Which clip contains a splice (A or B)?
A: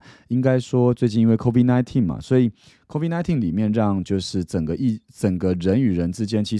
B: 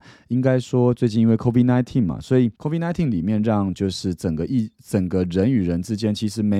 B